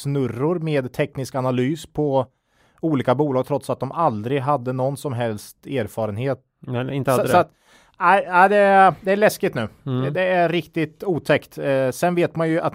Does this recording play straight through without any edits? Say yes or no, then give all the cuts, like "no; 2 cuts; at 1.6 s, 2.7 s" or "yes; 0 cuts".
yes; 0 cuts